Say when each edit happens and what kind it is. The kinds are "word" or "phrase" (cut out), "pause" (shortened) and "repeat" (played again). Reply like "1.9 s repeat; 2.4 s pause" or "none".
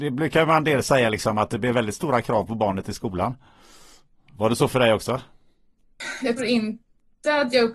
6.4 s word